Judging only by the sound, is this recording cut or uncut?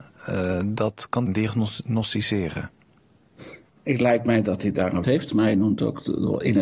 cut